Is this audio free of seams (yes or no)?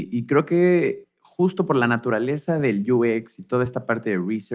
yes